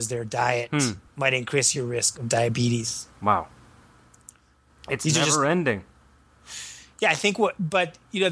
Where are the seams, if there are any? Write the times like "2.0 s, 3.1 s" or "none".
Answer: 1.1 s, 1.7 s, 2.1 s